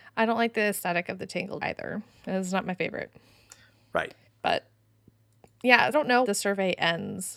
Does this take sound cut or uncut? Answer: cut